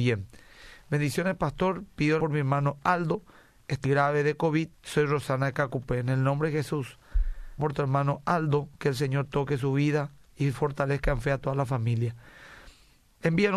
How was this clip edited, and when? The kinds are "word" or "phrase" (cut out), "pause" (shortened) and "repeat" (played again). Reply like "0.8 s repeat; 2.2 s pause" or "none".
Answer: 2.2 s word; 3.8 s word; 4.7 s pause; 7.6 s word; 8.7 s pause